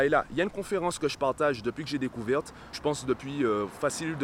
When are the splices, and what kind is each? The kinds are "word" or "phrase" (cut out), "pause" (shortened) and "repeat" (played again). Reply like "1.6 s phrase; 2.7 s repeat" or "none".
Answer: 2.7 s word